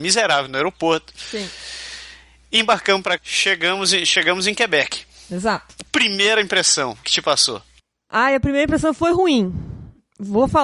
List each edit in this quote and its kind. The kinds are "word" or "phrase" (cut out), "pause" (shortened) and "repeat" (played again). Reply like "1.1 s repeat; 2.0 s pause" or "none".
3.2 s word; 7.0 s word